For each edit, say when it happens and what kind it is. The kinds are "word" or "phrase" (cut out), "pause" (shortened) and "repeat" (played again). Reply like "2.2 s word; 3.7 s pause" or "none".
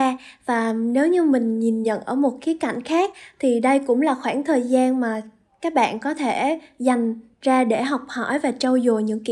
none